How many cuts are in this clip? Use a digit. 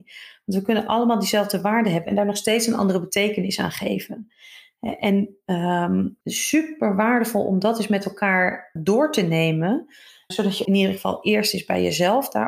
4